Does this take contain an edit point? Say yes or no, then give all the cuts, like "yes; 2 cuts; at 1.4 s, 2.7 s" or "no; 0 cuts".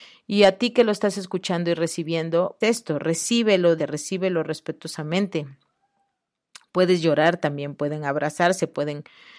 yes; 2 cuts; at 2.6 s, 3.8 s